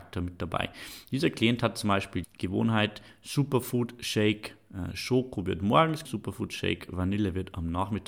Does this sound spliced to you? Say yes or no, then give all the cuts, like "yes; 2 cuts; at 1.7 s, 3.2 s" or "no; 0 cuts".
yes; 2 cuts; at 2.2 s, 6.0 s